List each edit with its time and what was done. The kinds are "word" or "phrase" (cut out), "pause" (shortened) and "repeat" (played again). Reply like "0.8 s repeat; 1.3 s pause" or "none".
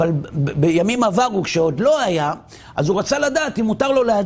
none